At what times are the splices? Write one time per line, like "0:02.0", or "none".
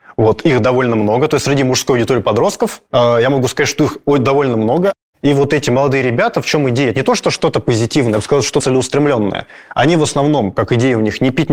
0:02.9
0:08.6